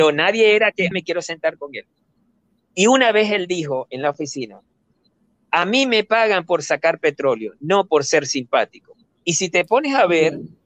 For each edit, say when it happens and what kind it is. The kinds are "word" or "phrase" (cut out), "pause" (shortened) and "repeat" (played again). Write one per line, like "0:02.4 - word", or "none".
0:00.9 - word